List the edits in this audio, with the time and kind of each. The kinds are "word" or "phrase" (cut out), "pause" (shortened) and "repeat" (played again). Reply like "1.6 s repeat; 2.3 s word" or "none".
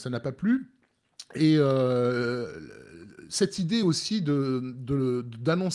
none